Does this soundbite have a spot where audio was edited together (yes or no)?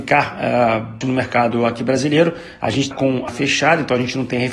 yes